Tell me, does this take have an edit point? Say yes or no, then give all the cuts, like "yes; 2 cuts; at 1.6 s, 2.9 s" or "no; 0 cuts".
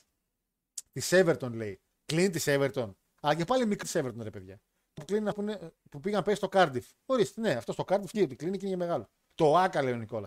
yes; 4 cuts; at 3.8 s, 5.0 s, 5.3 s, 8.1 s